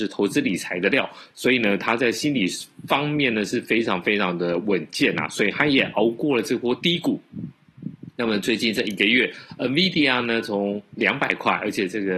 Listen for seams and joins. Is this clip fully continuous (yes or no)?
yes